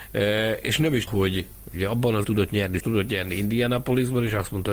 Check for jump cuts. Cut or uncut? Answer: cut